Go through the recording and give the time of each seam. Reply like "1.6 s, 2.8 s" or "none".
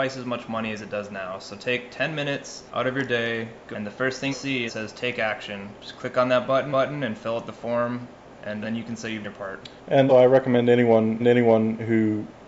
2.7 s, 3.7 s, 4.3 s, 4.7 s, 6.7 s, 8.6 s, 9.2 s, 10.1 s, 11.2 s

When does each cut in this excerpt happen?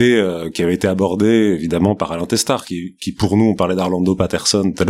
none

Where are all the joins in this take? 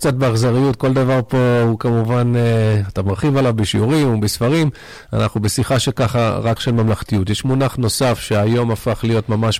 6.6 s

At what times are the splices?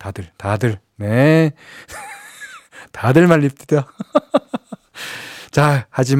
none

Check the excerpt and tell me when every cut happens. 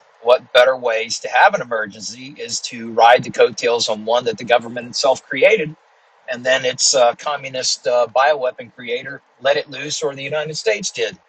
9.3 s

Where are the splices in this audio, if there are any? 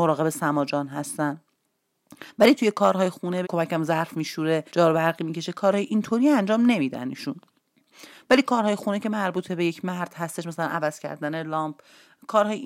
3.4 s, 4.7 s

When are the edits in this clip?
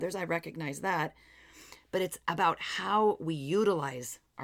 none

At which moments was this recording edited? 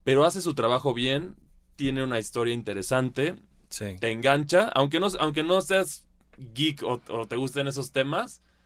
none

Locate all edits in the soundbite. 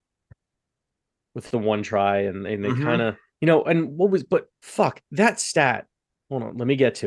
1.5 s, 3.3 s, 4.5 s

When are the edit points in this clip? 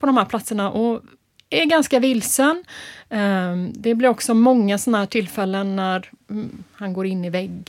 none

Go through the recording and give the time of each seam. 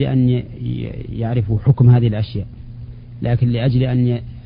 none

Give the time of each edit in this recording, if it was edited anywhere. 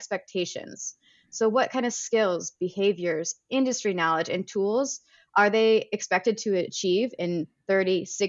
none

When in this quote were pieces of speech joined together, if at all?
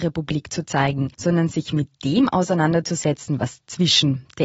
1.1 s

